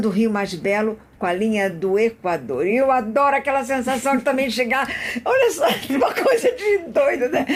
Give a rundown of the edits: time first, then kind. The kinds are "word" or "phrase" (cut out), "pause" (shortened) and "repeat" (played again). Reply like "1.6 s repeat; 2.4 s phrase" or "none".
none